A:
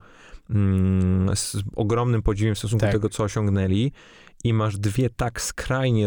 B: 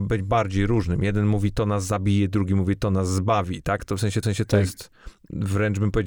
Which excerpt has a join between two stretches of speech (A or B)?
B